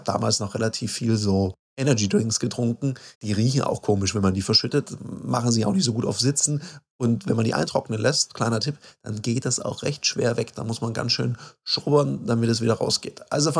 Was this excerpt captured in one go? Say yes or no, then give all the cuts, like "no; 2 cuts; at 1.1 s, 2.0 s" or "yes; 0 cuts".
no; 2 cuts; at 1.6 s, 3.1 s